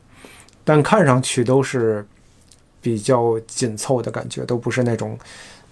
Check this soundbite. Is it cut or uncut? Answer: uncut